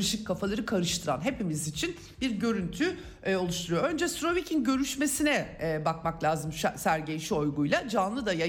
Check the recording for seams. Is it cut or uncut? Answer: uncut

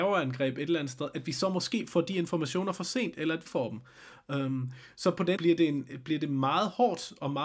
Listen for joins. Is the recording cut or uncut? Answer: cut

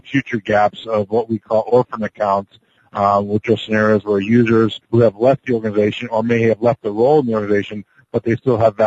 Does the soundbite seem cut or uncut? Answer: cut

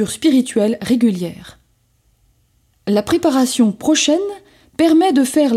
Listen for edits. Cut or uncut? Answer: uncut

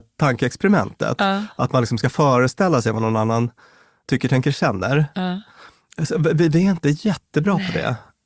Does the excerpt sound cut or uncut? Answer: uncut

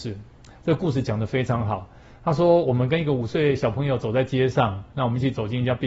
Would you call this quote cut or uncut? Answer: uncut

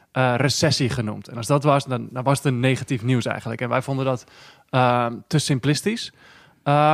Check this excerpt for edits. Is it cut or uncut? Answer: uncut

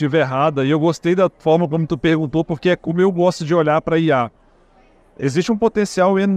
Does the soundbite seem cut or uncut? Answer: uncut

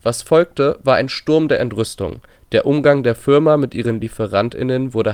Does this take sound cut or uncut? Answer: uncut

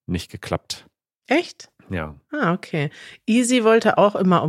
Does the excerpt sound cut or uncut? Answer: uncut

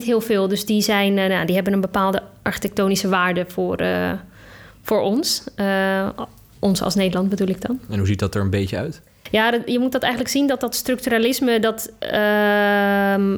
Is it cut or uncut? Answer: uncut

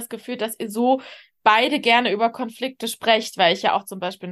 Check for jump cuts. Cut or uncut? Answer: uncut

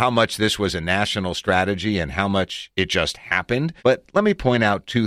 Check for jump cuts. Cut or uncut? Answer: cut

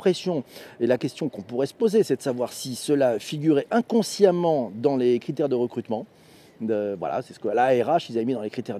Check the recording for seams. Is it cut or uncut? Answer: uncut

